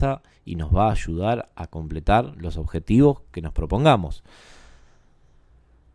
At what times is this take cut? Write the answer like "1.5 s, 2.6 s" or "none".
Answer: none